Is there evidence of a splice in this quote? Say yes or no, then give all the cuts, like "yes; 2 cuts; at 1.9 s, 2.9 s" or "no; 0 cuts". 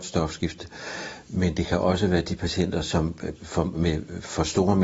yes; 1 cut; at 3.4 s